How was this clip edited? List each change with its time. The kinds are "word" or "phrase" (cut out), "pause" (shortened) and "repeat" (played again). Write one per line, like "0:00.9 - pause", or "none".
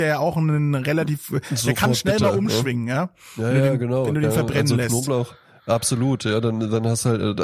none